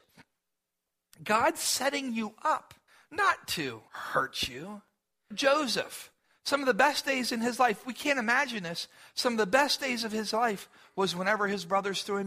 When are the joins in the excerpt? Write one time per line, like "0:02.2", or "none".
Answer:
0:02.9

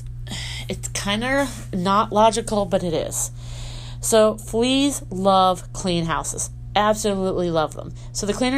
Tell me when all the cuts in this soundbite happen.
none

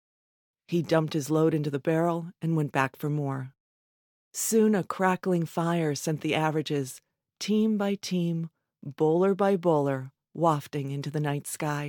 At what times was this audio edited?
none

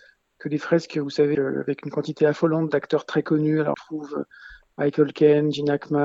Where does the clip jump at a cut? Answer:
0:01.3
0:03.7

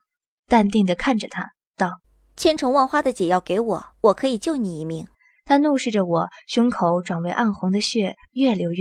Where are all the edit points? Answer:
0:02.0
0:03.9
0:05.1

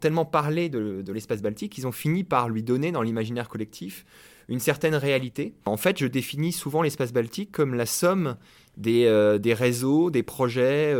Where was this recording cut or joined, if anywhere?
none

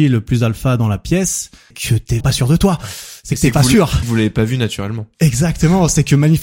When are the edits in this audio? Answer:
0:01.7
0:02.2
0:04.0

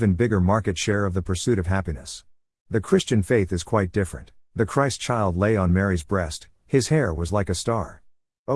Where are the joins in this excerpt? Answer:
0:04.4

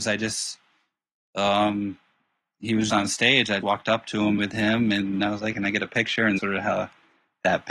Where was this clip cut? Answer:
0:02.9
0:03.6
0:04.4
0:05.2
0:05.5
0:06.4

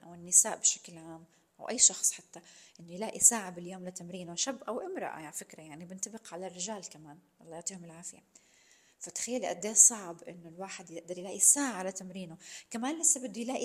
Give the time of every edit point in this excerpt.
none

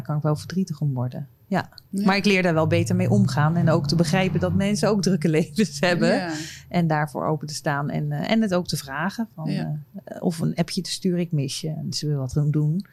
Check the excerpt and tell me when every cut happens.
none

